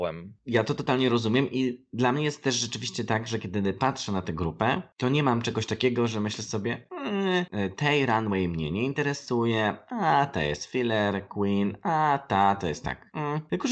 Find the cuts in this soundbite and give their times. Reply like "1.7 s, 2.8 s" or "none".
none